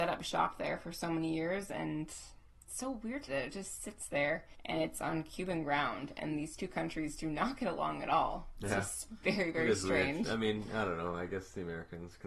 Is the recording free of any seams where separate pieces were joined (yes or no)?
no